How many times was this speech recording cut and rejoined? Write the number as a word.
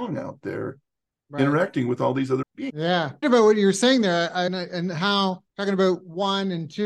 four